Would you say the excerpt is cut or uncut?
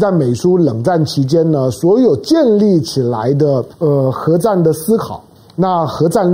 cut